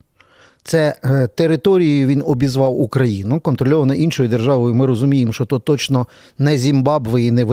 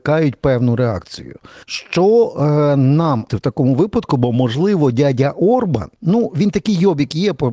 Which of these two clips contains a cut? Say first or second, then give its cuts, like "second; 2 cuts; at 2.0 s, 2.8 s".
second; 3 cuts; at 1.6 s, 3.3 s, 6.0 s